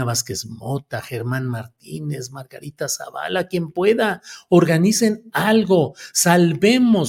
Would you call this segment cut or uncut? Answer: uncut